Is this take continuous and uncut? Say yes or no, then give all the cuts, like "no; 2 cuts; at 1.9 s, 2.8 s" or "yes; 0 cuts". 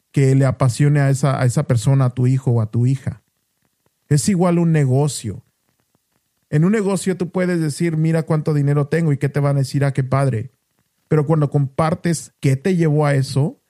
no; 1 cut; at 12.3 s